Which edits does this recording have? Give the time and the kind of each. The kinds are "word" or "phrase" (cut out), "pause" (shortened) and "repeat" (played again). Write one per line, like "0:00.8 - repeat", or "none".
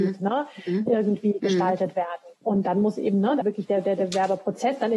0:02.4 - pause
0:03.4 - word